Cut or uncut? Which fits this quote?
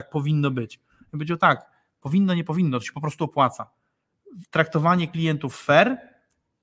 uncut